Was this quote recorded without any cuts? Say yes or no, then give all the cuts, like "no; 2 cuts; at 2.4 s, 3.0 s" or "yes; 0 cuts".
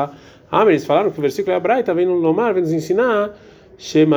yes; 0 cuts